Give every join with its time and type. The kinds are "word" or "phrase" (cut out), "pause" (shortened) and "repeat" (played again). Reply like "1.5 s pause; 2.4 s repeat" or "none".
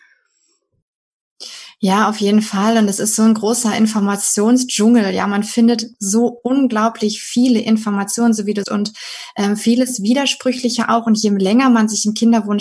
8.6 s word

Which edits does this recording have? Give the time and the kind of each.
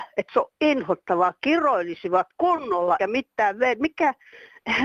3.0 s word

